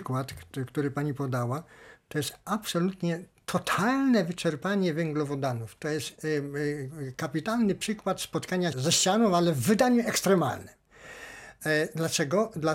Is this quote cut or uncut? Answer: cut